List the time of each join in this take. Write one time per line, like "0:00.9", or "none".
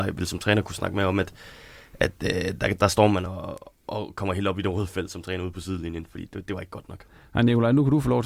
none